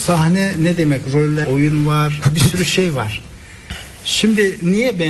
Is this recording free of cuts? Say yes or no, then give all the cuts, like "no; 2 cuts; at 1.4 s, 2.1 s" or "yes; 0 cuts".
no; 1 cut; at 1.4 s